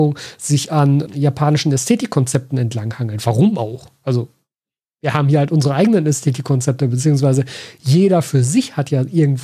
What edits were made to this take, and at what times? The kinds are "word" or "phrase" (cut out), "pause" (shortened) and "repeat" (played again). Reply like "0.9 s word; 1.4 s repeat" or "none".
1.1 s word